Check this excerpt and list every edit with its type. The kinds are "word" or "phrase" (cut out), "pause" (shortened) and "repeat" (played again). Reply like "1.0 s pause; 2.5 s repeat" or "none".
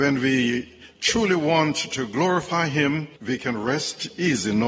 3.2 s pause